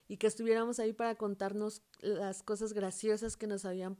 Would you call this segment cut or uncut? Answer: uncut